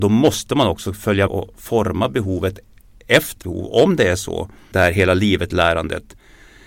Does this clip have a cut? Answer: yes; 3 cuts; at 1.3 s, 3.4 s, 4.7 s

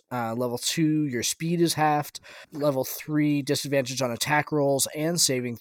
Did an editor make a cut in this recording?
yes; 1 cut; at 2.4 s

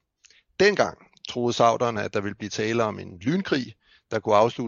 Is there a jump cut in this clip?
no; 0 cuts

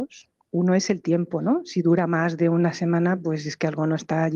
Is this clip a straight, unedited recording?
yes; 0 cuts

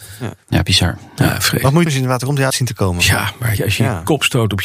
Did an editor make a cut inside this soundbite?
yes; 3 cuts; at 1.9 s, 2.5 s, 3.6 s

